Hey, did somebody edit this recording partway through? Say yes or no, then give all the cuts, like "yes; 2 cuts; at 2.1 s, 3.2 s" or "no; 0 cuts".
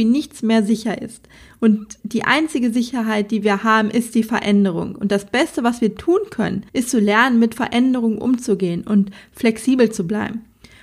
yes; 2 cuts; at 2.0 s, 6.7 s